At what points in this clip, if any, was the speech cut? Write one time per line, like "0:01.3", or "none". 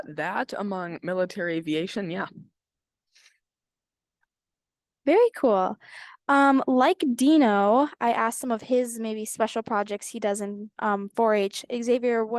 none